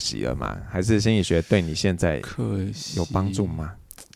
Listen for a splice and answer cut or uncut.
uncut